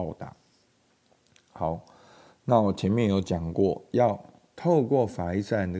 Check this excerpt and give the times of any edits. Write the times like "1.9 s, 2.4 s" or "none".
none